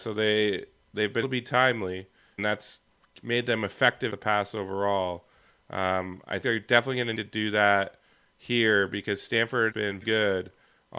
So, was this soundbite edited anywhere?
yes; 7 cuts; at 1.2 s, 2.4 s, 4.1 s, 6.4 s, 7.1 s, 9.7 s, 10.0 s

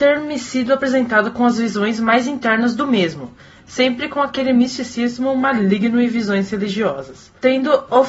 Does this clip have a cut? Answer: no; 0 cuts

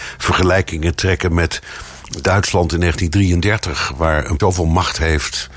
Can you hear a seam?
yes; 1 cut; at 4.4 s

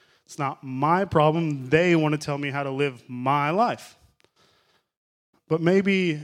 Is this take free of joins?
yes; 0 cuts

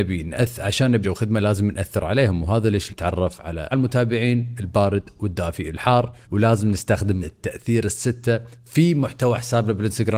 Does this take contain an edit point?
yes; 5 cuts; at 1.0 s, 2.9 s, 3.7 s, 6.2 s, 7.2 s

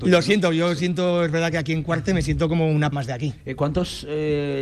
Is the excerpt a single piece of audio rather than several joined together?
no; 1 cut; at 2.9 s

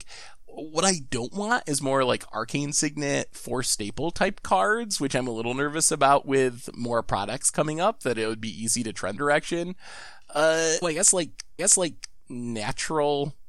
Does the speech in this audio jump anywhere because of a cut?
yes; 3 cuts; at 9.2 s, 10.8 s, 11.6 s

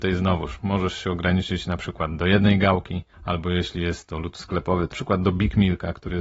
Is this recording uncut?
no; 2 cuts; at 3.1 s, 4.9 s

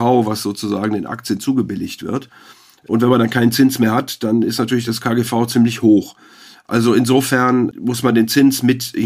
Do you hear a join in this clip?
no; 0 cuts

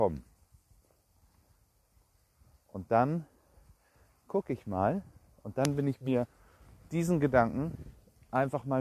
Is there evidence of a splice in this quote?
no; 0 cuts

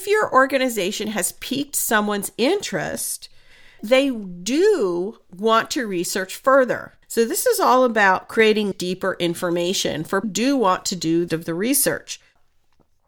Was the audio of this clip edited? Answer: yes; 5 cuts; at 3.8 s, 7.0 s, 8.7 s, 10.2 s, 11.3 s

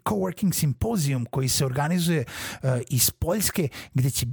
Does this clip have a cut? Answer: no; 0 cuts

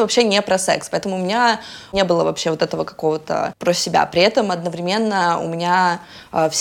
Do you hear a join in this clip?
no; 0 cuts

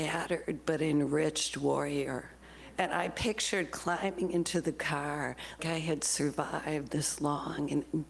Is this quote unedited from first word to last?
no; 1 cut; at 5.6 s

